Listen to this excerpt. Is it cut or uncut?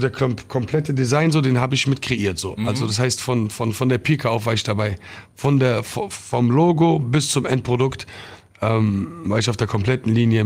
uncut